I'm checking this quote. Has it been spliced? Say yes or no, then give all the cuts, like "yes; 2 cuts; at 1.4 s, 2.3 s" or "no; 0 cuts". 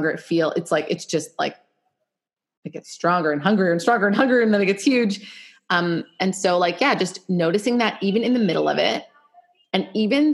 no; 0 cuts